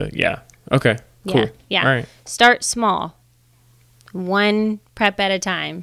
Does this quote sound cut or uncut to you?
uncut